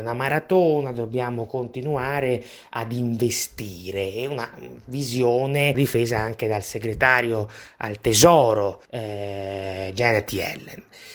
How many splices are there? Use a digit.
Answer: 2